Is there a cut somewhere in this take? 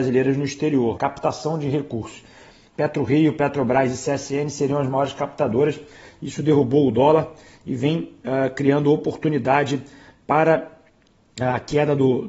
yes; 1 cut; at 0.9 s

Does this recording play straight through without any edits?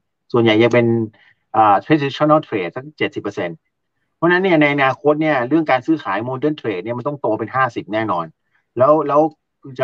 yes; 0 cuts

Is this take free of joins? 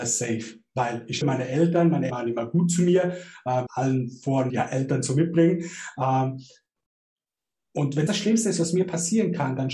no; 5 cuts; at 1.2 s, 2.1 s, 3.7 s, 4.5 s, 8.1 s

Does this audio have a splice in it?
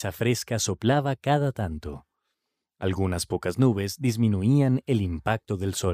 no; 0 cuts

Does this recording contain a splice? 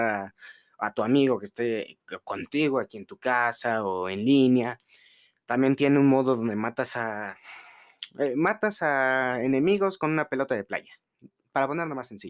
no; 0 cuts

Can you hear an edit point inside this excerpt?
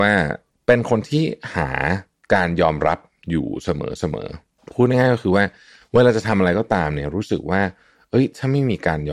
no; 0 cuts

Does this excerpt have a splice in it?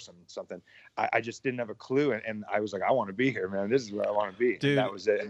no; 0 cuts

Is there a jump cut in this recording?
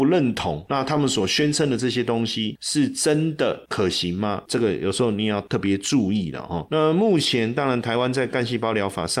no; 0 cuts

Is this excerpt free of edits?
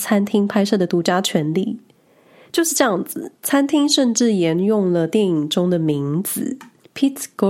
yes; 0 cuts

